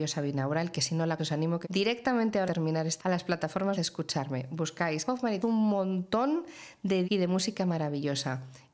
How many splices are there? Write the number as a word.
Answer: eight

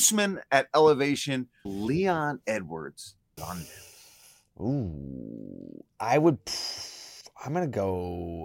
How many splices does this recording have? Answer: four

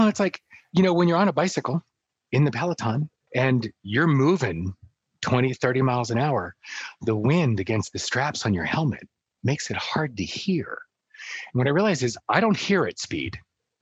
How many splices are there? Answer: zero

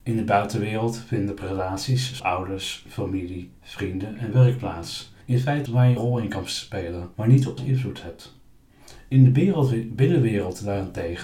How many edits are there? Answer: six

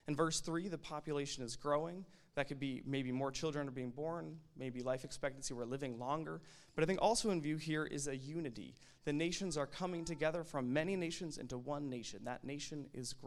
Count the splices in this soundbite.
zero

